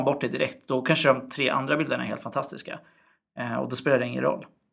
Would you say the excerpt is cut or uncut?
uncut